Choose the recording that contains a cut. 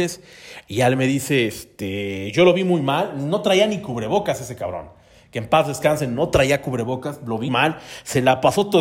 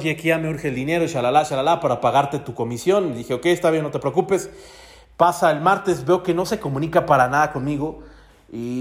first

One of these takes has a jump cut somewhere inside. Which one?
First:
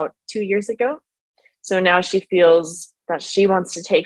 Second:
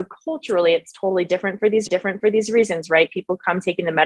second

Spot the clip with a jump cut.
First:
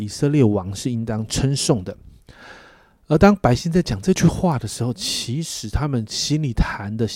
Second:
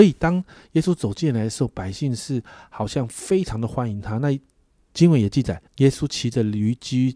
second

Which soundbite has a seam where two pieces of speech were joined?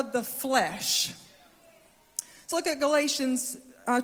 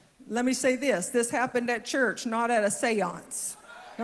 first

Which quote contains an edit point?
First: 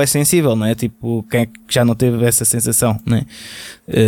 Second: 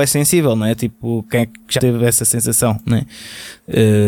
second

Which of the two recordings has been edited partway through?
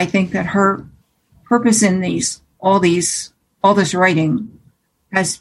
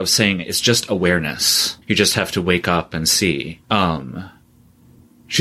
second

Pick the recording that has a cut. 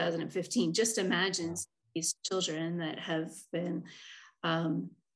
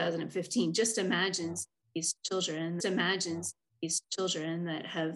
second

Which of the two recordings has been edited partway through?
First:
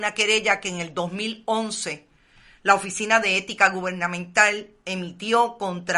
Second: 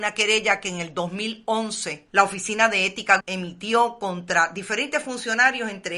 second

